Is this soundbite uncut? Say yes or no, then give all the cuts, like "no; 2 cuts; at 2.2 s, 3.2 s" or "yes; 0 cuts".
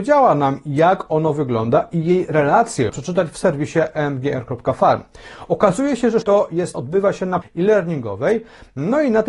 no; 4 cuts; at 2.9 s, 6.2 s, 6.7 s, 7.4 s